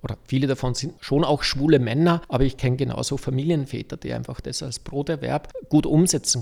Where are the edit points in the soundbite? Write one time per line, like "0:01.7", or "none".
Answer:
none